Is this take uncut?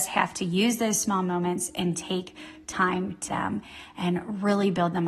no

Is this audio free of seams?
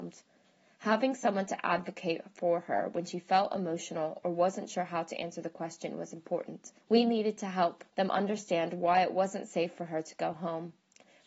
no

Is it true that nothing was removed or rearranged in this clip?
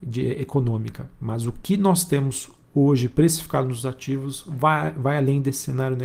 yes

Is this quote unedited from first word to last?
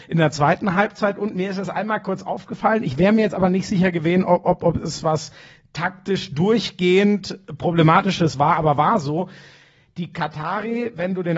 yes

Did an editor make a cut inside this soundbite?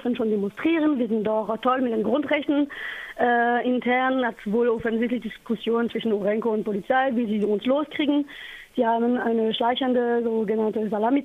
no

